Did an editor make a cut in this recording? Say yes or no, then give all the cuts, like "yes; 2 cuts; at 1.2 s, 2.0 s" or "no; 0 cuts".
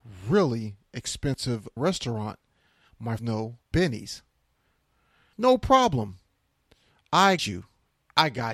yes; 5 cuts; at 1.8 s, 3.2 s, 3.7 s, 5.3 s, 7.4 s